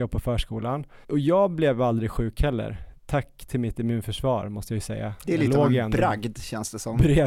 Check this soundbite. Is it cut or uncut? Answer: cut